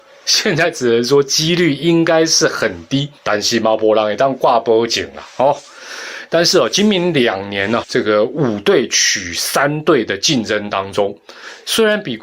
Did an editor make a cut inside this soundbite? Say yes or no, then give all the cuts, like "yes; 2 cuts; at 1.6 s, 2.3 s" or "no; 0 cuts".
yes; 2 cuts; at 3.2 s, 7.8 s